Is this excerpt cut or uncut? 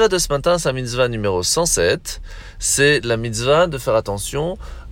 uncut